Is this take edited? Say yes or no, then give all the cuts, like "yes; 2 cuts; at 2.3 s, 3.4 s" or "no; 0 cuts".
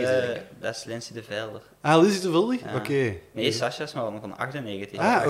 no; 0 cuts